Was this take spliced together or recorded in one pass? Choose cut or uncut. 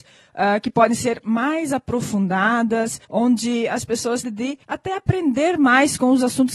cut